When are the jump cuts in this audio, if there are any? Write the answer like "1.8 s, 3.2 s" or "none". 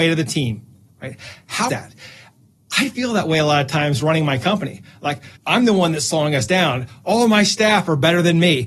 1.7 s, 5.4 s